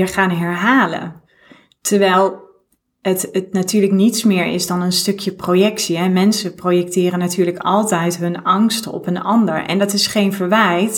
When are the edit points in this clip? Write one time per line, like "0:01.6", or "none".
none